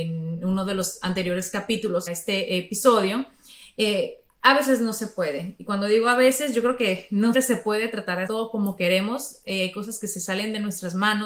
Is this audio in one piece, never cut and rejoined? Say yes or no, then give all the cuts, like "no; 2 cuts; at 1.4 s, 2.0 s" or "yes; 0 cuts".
no; 3 cuts; at 2.1 s, 7.3 s, 8.3 s